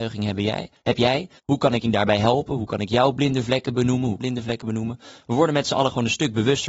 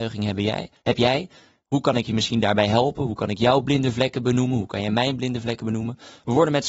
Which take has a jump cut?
first; 3 cuts; at 1.4 s, 1.8 s, 4.2 s

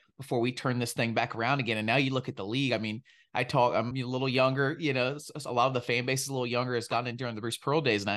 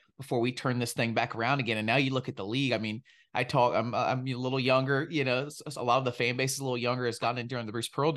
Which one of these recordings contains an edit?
first; 1 cut; at 3.9 s

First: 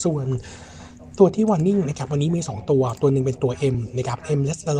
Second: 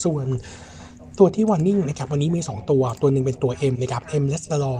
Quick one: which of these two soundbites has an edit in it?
second; 1 cut; at 3.7 s

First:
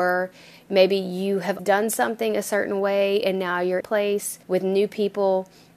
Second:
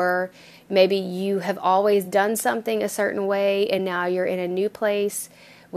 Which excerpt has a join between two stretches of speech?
first; 3 cuts; at 1.6 s, 3.8 s, 4.4 s

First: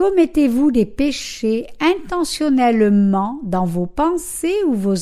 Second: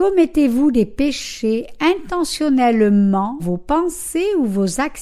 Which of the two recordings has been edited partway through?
second; 1 cut; at 3.4 s

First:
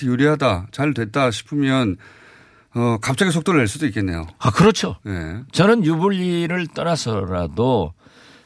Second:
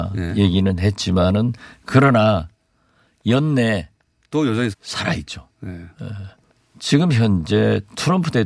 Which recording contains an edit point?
second; 2 cuts; at 4.7 s, 6.4 s

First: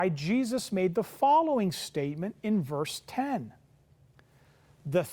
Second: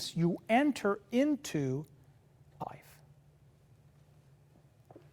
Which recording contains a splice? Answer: second; 1 cut; at 2.6 s

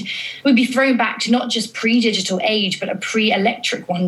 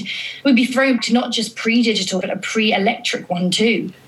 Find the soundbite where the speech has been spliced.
second; 2 cuts; at 1.0 s, 2.2 s

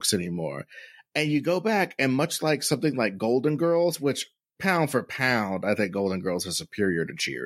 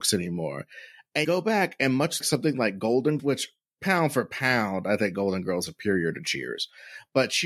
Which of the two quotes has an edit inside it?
second; 4 cuts; at 1.2 s, 2.2 s, 3.2 s, 5.7 s

